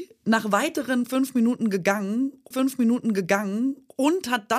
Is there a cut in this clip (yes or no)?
yes